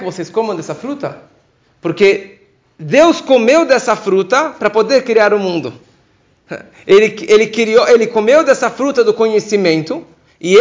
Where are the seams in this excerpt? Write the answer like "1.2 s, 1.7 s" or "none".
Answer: none